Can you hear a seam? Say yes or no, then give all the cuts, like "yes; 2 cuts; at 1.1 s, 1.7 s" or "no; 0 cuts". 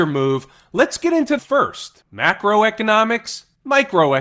yes; 1 cut; at 1.4 s